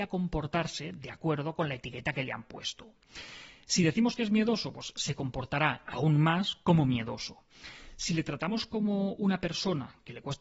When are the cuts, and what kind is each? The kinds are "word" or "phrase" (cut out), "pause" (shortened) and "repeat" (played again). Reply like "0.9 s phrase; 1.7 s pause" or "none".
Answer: none